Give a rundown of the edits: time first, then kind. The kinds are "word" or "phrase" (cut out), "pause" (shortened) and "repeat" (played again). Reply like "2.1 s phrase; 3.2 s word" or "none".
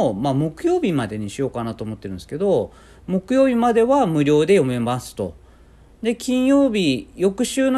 none